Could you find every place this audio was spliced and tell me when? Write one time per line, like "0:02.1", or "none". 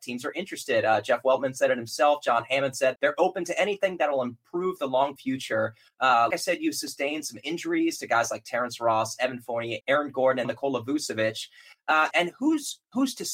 0:03.0
0:05.2
0:06.3
0:09.8
0:10.4
0:12.1